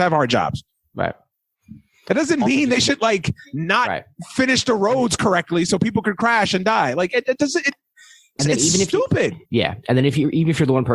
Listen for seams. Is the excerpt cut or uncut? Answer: cut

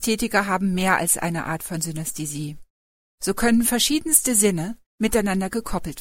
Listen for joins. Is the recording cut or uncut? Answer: uncut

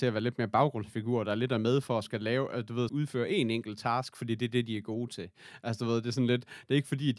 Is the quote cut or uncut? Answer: cut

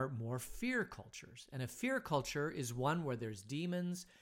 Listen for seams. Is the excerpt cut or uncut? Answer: uncut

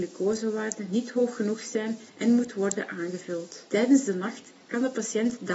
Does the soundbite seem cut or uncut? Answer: cut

